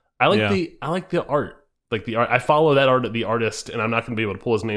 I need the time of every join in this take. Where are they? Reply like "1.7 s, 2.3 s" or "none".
none

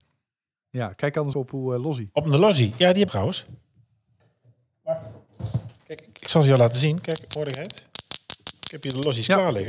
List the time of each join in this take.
1.3 s, 3.1 s

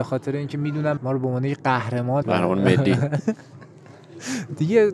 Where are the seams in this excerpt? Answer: 1.0 s, 2.2 s

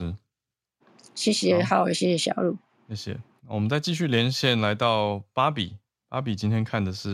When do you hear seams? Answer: none

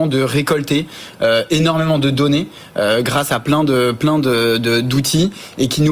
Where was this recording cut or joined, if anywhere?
none

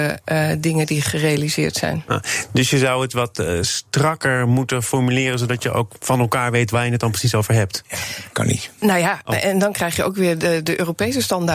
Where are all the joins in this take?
8.8 s

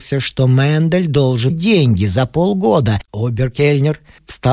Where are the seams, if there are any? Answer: 1.5 s, 3.0 s

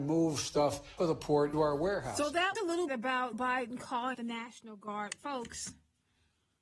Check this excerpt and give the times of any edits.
1.0 s, 1.5 s, 2.5 s, 2.9 s, 3.3 s, 4.1 s

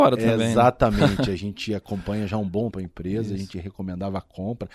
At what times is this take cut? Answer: 2.7 s

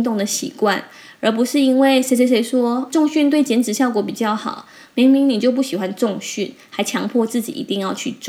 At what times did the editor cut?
2.9 s

